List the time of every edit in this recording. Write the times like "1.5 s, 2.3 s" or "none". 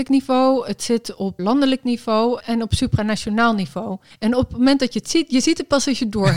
1.4 s, 2.4 s, 4.1 s